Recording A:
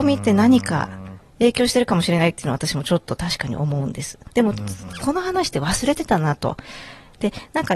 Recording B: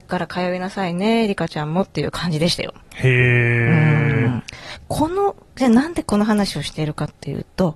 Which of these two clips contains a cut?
B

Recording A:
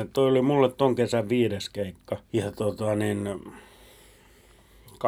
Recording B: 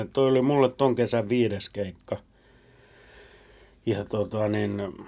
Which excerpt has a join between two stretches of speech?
A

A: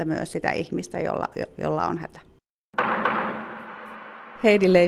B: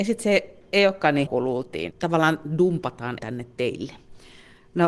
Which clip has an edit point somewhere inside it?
B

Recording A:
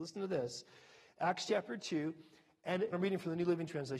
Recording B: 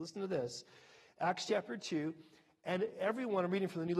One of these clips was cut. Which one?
A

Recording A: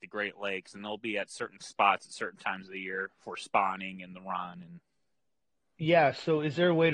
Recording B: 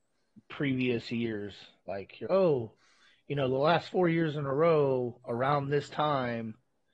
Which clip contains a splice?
B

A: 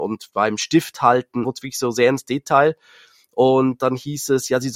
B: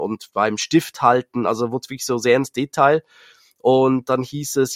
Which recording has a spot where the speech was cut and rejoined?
A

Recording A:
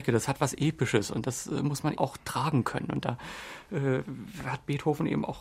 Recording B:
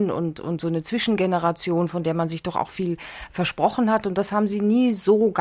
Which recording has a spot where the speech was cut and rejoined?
A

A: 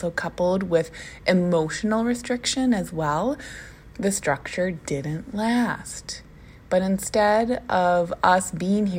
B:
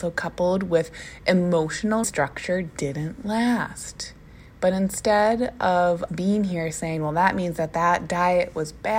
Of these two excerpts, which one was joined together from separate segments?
B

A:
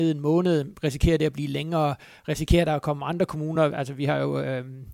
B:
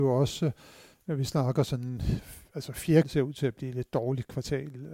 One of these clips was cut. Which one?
B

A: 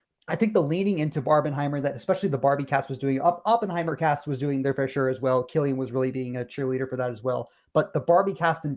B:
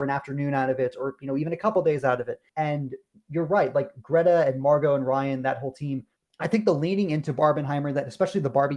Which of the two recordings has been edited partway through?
B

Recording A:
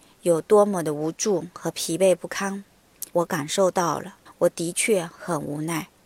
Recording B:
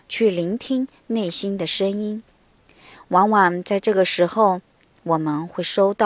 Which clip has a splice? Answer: A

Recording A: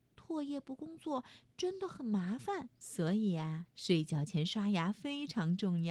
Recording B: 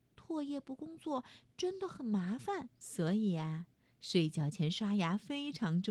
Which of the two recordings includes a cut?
A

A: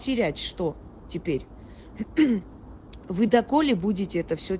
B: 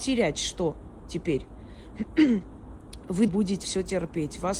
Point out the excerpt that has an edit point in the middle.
B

